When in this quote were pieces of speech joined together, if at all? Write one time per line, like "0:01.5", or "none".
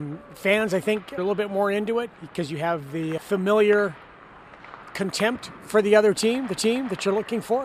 0:01.2
0:02.1
0:03.2
0:06.6